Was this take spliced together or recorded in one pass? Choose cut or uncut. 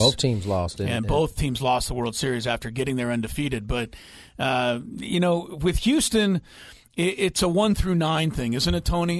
uncut